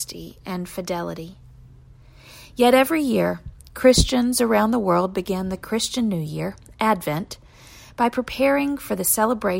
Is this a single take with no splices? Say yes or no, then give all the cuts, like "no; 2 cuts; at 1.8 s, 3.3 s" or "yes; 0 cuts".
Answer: yes; 0 cuts